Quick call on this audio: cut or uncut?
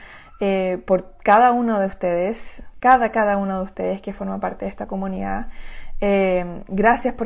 uncut